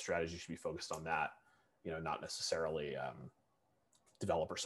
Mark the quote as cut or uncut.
uncut